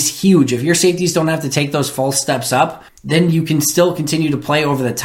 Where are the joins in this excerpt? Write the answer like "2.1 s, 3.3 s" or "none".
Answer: 2.9 s